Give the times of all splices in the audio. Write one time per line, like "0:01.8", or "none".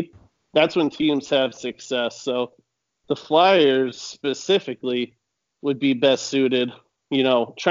none